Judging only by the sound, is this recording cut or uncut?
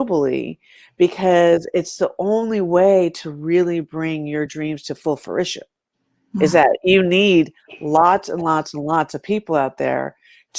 uncut